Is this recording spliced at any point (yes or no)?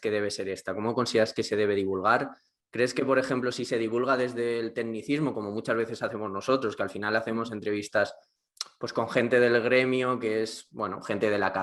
no